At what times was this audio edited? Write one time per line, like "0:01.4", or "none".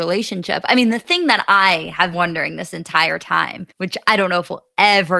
0:02.1
0:03.7